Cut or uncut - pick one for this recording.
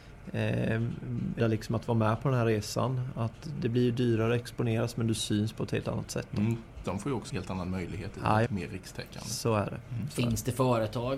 cut